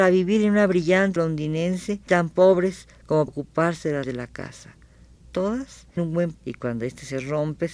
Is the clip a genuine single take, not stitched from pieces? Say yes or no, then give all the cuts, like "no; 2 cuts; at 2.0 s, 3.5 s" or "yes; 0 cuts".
no; 6 cuts; at 1.2 s, 2.1 s, 3.3 s, 4.0 s, 6.0 s, 6.3 s